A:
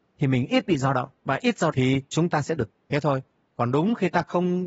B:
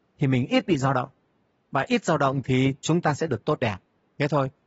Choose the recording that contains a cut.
A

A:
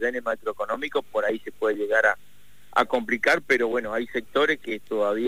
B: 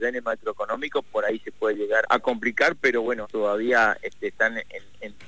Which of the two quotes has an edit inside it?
B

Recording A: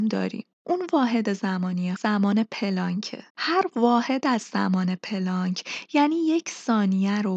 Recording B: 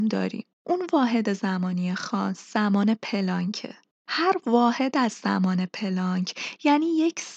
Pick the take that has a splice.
A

